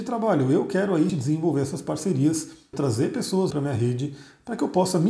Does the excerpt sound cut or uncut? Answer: cut